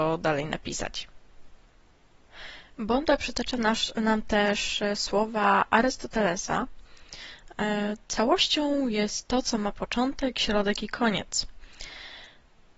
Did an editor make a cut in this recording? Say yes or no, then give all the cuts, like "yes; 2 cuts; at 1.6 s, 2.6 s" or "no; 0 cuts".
no; 0 cuts